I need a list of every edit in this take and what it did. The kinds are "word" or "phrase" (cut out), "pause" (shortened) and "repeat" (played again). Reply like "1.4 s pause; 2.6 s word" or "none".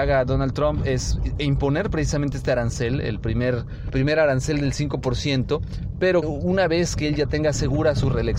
3.9 s word; 6.2 s word